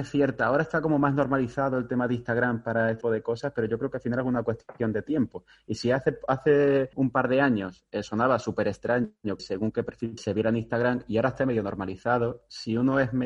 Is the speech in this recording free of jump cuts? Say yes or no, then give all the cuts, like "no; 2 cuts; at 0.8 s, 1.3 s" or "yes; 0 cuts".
no; 4 cuts; at 3.0 s, 6.9 s, 9.4 s, 10.2 s